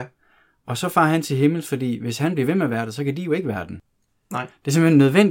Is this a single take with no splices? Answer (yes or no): yes